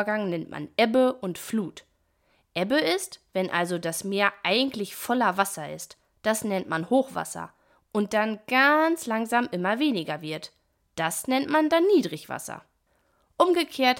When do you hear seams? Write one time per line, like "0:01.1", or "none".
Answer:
none